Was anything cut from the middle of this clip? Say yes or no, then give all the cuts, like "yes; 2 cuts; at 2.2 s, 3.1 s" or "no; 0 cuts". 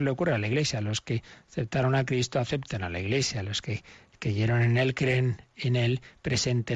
no; 0 cuts